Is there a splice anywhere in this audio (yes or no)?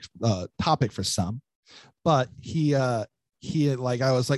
no